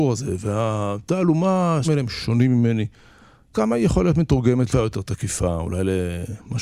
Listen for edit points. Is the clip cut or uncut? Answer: cut